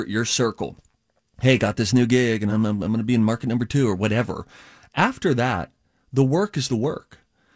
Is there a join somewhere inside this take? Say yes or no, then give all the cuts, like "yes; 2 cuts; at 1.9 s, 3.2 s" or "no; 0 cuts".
no; 0 cuts